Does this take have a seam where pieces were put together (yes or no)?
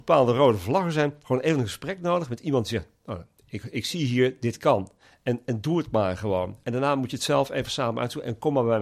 no